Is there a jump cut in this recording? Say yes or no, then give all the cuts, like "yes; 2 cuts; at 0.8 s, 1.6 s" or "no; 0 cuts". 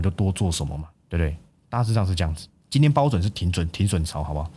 no; 0 cuts